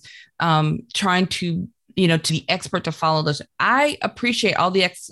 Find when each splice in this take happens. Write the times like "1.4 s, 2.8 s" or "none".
2.3 s